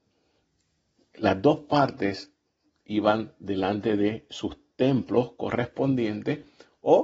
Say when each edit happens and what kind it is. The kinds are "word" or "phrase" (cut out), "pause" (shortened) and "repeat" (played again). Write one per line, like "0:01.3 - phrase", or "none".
none